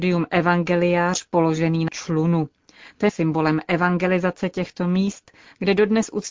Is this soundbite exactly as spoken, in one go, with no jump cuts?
no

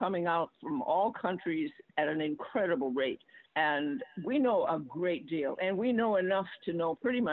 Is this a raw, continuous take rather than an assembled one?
no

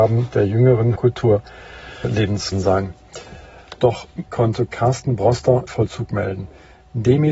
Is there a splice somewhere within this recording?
yes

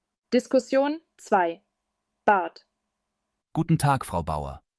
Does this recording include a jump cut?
no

